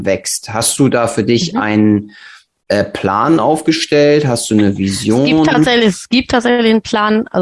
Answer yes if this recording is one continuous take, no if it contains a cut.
yes